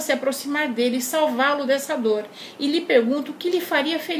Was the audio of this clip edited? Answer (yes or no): no